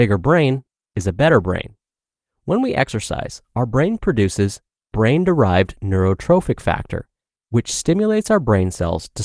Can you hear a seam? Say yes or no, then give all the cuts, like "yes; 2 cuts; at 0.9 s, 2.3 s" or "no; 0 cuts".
no; 0 cuts